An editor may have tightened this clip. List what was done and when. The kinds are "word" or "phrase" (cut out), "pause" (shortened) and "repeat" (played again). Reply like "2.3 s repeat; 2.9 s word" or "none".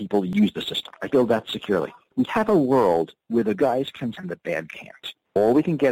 1.1 s word; 2.3 s word; 3.6 s word; 4.1 s word; 4.7 s word